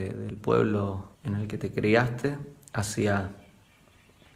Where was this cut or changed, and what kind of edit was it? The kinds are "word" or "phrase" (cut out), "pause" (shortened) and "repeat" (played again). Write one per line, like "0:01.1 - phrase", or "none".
0:01.1 - pause